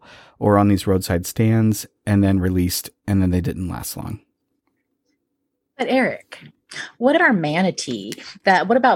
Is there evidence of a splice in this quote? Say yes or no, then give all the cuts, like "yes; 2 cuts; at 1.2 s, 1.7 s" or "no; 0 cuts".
yes; 1 cut; at 7.2 s